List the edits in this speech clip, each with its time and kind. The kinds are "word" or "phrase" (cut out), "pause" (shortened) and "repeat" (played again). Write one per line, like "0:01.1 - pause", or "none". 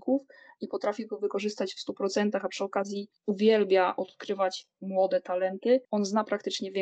0:03.2 - pause
0:05.8 - pause